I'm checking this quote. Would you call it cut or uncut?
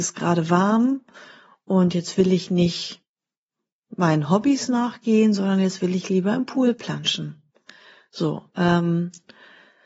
uncut